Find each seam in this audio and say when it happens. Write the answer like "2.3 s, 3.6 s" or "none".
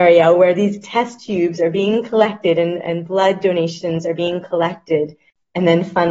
none